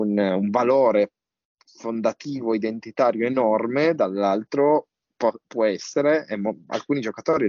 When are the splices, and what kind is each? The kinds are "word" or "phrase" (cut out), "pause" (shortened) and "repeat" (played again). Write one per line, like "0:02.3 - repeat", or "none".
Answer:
none